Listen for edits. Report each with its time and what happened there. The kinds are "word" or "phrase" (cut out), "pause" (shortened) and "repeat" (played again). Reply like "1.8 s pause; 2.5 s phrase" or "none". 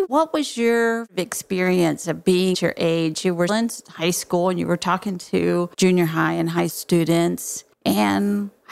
2.5 s phrase; 3.5 s word; 5.7 s pause; 6.7 s word; 7.7 s pause